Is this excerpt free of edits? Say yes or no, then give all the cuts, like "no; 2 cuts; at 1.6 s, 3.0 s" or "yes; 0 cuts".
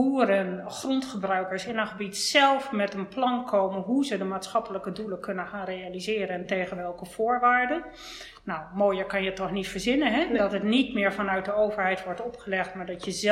yes; 0 cuts